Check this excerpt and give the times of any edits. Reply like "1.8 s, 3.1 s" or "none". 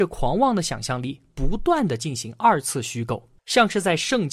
3.4 s